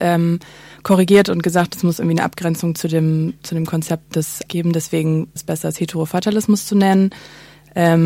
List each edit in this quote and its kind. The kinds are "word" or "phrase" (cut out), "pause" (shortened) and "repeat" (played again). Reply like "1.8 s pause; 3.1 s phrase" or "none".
4.5 s word; 5.4 s word